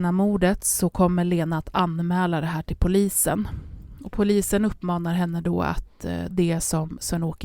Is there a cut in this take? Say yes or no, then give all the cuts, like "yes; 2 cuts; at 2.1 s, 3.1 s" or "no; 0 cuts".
yes; 1 cut; at 6.3 s